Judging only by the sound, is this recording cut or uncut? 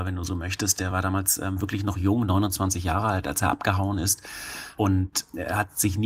uncut